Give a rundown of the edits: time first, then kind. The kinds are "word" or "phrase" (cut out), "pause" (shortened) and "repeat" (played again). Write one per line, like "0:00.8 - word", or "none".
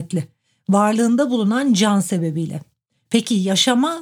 none

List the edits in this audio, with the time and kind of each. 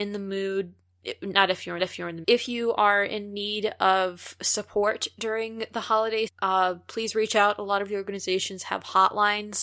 0:01.8 - repeat
0:02.2 - phrase
0:06.3 - word

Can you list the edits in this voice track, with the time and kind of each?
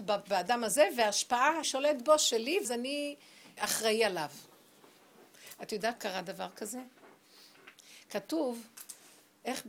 0:01.6 - word
0:02.6 - word
0:03.6 - word
0:05.9 - word

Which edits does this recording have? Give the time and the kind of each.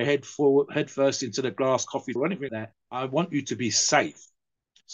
0:02.2 - word
0:02.5 - word
0:02.8 - pause

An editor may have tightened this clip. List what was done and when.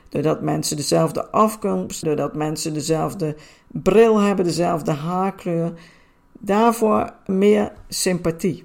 0:02.0 - word
0:07.3 - phrase

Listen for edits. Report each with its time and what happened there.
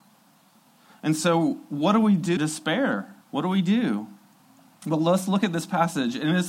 0:02.4 - phrase
0:03.2 - pause

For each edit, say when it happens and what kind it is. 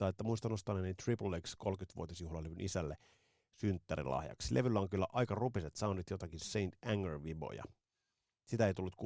none

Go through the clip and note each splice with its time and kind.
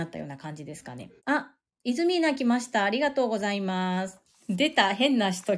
0:01.2 - pause

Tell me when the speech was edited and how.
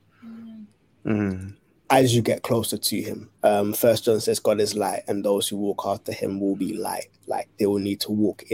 none

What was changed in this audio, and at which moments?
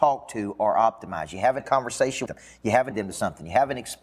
0:01.6 - word
0:02.3 - word
0:02.9 - word

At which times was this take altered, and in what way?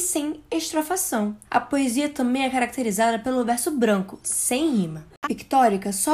0:01.4 - pause
0:05.2 - word

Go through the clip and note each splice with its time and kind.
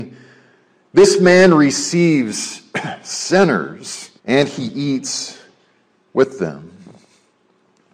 0:04.2 - pause

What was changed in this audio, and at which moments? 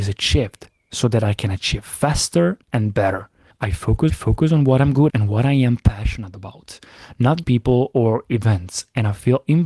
0:02.6 - pause
0:03.5 - pause
0:04.1 - repeat
0:05.1 - word
0:07.4 - word

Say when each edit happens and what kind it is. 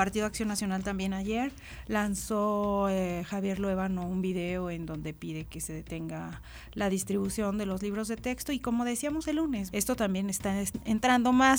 0:09.7 - word

